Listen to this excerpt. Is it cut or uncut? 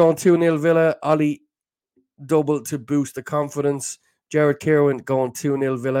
uncut